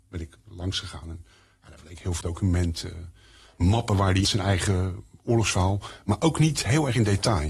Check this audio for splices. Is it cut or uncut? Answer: cut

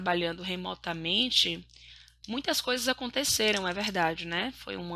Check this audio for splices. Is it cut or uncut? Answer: uncut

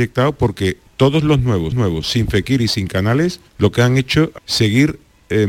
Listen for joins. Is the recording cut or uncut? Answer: cut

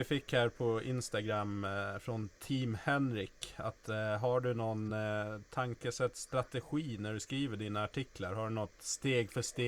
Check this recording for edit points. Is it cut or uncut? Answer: uncut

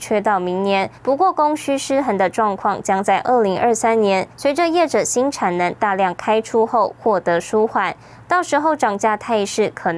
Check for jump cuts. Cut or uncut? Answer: cut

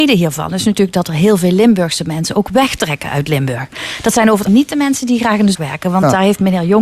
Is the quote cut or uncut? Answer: cut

